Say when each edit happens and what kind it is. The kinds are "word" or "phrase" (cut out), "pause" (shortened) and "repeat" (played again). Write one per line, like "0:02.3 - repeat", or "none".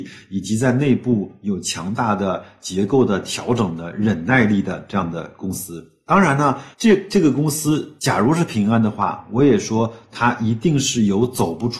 0:06.7 - pause
0:08.0 - pause